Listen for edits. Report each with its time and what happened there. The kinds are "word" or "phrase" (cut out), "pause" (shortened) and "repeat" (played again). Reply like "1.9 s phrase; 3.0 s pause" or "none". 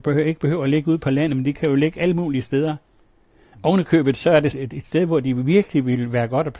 4.5 s phrase